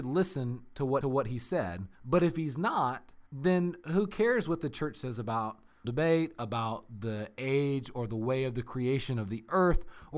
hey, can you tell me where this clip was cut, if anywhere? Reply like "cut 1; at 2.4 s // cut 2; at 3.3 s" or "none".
cut 1; at 1.0 s // cut 2; at 1.9 s // cut 3; at 3.3 s // cut 4; at 5.8 s